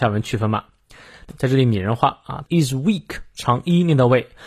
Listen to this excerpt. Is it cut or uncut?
cut